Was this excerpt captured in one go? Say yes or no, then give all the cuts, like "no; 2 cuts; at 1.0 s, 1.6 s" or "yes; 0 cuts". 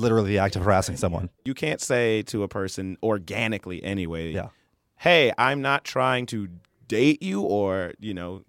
no; 1 cut; at 1.4 s